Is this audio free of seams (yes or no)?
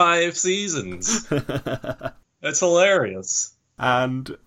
yes